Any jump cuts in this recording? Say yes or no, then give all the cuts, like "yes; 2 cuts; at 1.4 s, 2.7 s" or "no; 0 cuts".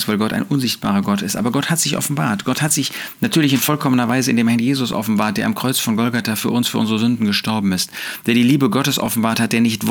no; 0 cuts